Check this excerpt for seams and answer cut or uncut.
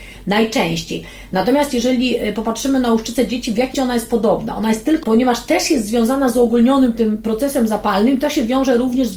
cut